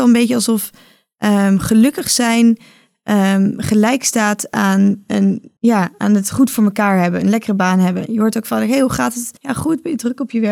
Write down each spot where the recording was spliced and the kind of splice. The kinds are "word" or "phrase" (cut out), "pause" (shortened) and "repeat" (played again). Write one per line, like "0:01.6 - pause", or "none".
0:05.6 - pause
0:09.4 - pause